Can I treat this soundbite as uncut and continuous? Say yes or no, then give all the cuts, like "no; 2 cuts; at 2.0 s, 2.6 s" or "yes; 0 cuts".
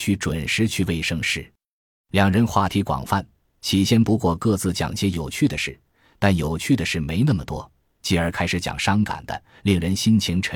yes; 0 cuts